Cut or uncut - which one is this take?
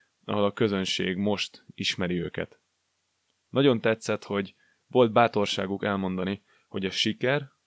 uncut